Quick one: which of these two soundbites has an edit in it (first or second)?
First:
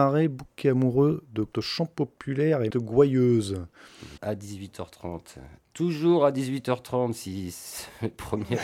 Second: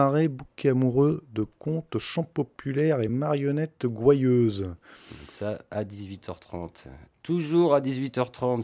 first